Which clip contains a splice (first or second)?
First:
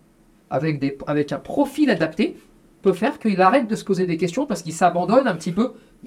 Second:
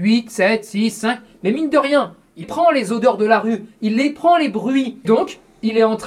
second